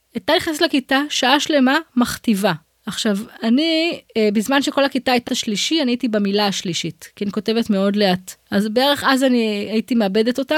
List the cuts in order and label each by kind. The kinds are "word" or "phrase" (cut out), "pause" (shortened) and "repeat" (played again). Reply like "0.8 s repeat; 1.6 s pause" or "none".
5.3 s word